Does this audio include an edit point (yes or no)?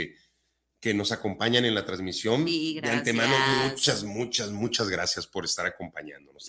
no